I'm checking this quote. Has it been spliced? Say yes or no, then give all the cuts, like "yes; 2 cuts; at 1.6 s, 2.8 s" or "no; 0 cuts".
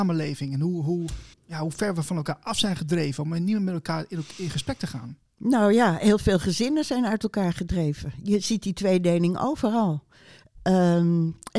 yes; 1 cut; at 1.3 s